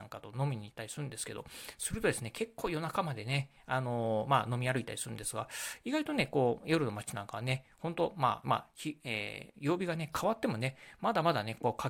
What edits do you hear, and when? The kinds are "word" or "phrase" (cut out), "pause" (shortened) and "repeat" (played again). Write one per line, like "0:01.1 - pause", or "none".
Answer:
0:08.4 - phrase